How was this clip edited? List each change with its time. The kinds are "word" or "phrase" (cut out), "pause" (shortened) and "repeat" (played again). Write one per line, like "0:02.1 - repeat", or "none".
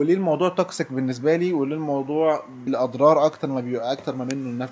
0:02.7 - word